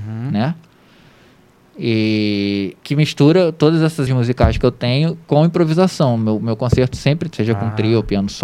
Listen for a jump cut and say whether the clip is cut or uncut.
cut